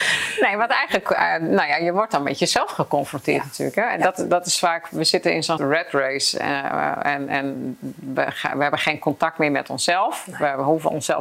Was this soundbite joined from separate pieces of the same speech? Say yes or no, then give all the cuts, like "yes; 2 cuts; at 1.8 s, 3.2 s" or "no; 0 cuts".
yes; 1 cut; at 5.6 s